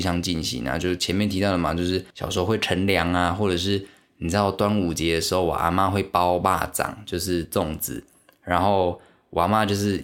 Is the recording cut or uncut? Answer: cut